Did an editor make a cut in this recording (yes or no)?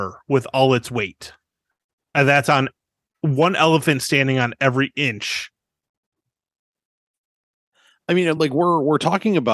no